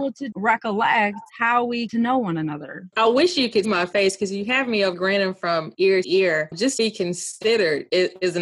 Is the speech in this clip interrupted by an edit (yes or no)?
yes